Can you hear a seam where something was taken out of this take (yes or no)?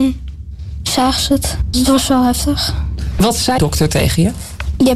yes